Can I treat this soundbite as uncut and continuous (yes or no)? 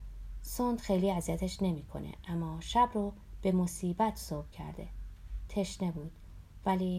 yes